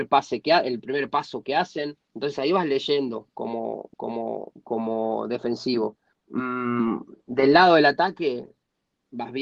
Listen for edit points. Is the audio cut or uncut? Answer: cut